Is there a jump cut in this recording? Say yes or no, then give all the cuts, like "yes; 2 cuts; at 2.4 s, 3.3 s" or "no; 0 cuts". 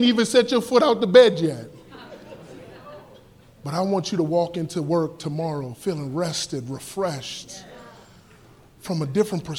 no; 0 cuts